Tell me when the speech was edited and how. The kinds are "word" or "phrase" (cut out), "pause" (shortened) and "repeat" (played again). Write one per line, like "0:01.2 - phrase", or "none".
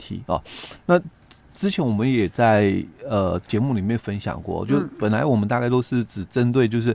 none

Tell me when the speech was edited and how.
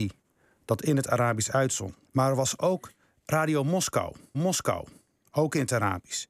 0:02.1 - pause
0:04.3 - repeat

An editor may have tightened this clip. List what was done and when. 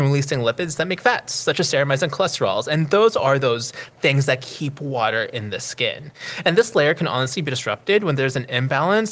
none

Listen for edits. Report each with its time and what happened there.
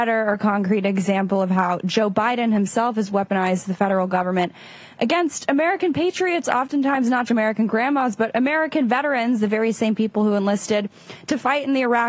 0:07.3 - word

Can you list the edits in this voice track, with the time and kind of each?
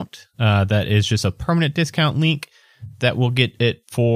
none

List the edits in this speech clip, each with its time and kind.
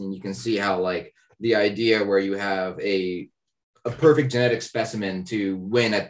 none

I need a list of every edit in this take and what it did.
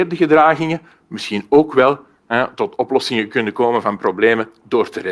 none

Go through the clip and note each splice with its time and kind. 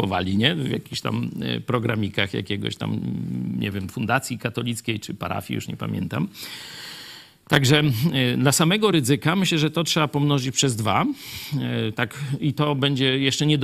none

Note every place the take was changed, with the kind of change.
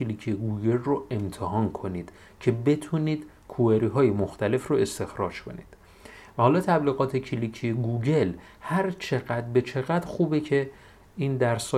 none

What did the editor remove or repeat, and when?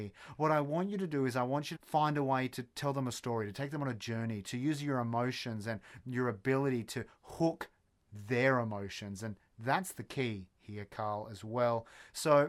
0:01.7 - word

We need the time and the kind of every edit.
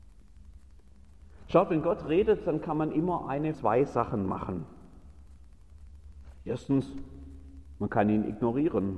0:03.5 - word

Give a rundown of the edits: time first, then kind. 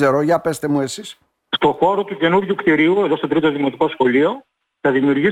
none

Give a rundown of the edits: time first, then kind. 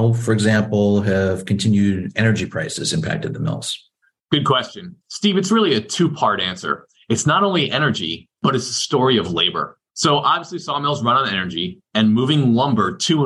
0:04.0 - pause
0:05.0 - pause
0:08.3 - pause
0:09.9 - pause

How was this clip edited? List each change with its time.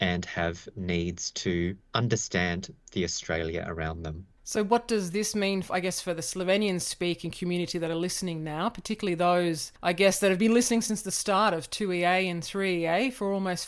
0:01.8 - pause
0:04.4 - pause
0:09.7 - pause

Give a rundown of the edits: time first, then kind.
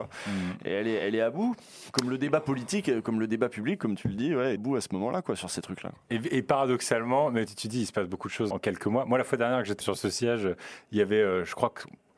0:04.6 - phrase
0:07.5 - word
0:08.5 - word
0:09.8 - word

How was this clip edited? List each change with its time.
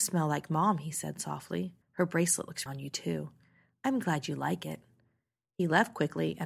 0:01.8 - pause
0:02.7 - word

